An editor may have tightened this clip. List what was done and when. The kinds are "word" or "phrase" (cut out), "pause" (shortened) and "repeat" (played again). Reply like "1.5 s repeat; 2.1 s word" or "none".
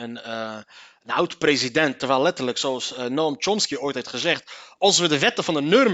none

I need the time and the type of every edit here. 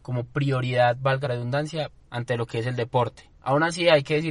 1.2 s word; 2.1 s word; 3.3 s pause

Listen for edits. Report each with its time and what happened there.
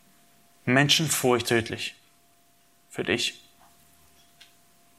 1.4 s word

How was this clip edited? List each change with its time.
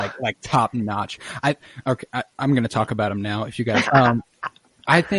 3.9 s word

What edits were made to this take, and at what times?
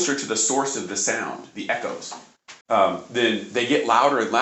2.6 s pause

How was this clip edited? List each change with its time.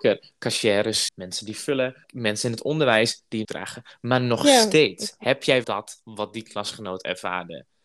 1.1 s word; 2.0 s word; 3.4 s word; 5.6 s word

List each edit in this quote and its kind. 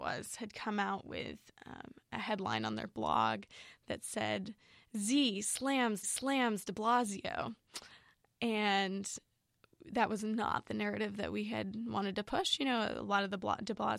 6.0 s repeat

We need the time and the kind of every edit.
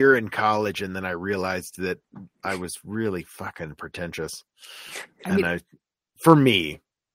2.3 s pause

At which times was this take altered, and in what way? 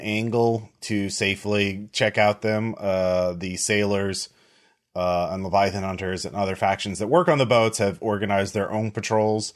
none

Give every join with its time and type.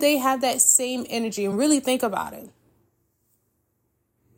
none

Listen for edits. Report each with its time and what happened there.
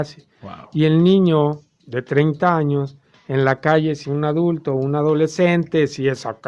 4.0 s word

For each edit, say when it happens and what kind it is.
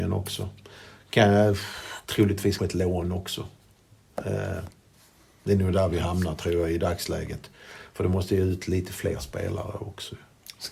2.6 s word

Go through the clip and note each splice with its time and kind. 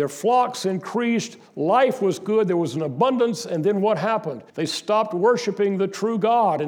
4.5 s pause

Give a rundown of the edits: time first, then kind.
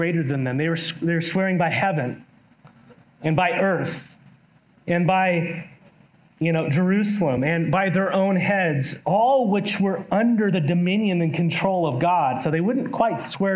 none

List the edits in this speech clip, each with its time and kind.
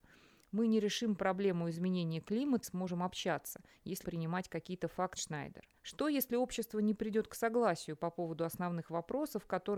2.6 s phrase; 4.0 s phrase; 5.2 s phrase; 5.8 s pause

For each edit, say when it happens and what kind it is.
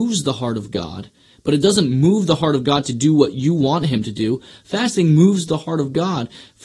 none

